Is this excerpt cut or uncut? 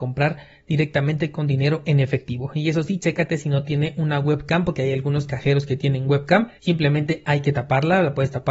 cut